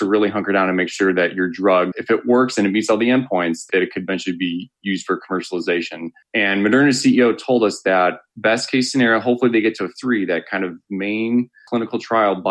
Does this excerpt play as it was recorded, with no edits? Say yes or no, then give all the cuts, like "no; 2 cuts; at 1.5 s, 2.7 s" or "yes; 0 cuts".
no; 1 cut; at 10.0 s